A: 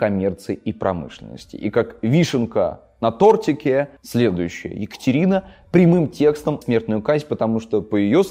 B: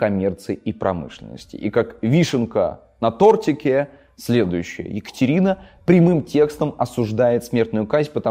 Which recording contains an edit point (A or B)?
A